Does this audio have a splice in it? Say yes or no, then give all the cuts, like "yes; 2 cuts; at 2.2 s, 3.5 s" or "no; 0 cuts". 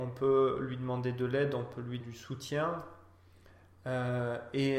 yes; 1 cut; at 2.0 s